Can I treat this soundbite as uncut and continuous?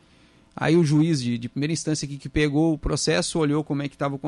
yes; 0 cuts

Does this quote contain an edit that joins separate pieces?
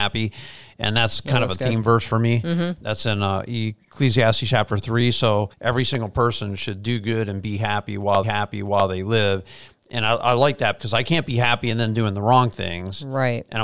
yes; 3 cuts; at 5.5 s, 8.2 s, 10.8 s

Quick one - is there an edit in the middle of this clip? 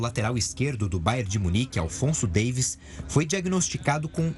no; 0 cuts

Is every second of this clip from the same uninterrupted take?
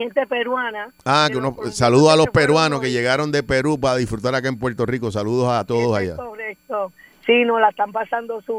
yes; 0 cuts

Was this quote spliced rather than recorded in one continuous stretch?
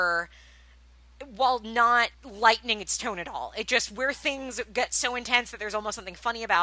yes; 1 cut; at 2.1 s

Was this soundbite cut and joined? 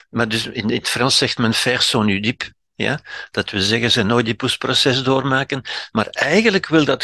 no; 0 cuts

